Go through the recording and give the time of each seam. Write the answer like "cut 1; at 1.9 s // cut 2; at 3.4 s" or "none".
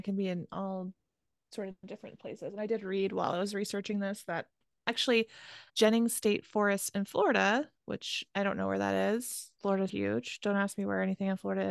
cut 1; at 5.7 s // cut 2; at 9.9 s